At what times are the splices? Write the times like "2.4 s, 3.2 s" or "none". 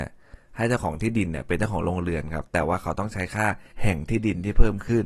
3.7 s